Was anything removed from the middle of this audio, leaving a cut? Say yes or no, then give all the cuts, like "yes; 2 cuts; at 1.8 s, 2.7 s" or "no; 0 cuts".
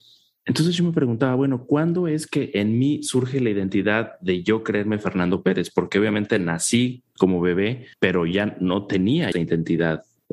yes; 2 cuts; at 7.9 s, 9.3 s